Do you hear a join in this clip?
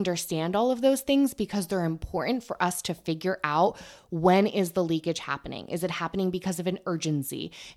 no; 0 cuts

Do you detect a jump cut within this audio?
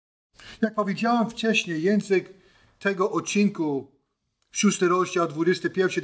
no; 0 cuts

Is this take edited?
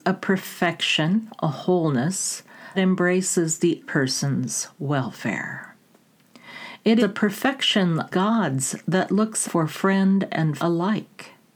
yes; 6 cuts; at 2.7 s, 3.8 s, 7.0 s, 8.1 s, 9.4 s, 10.6 s

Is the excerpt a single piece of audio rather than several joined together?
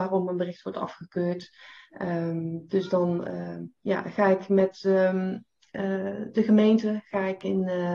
yes; 0 cuts

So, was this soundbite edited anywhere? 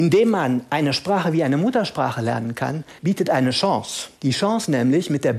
yes; 2 cuts; at 3.0 s, 4.2 s

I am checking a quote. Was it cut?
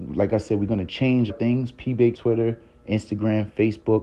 yes; 2 cuts; at 1.3 s, 2.1 s

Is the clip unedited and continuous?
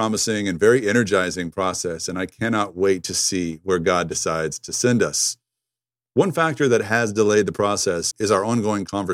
yes; 0 cuts

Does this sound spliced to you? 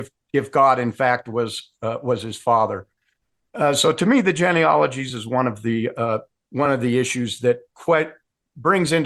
no; 0 cuts

